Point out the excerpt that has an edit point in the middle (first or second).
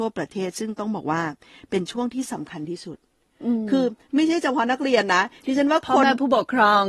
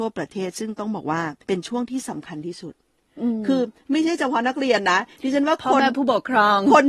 second